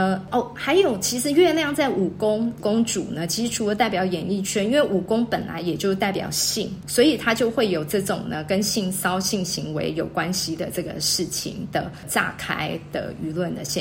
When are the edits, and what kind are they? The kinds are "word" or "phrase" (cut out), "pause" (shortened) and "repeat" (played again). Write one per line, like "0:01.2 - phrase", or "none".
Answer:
0:06.8 - word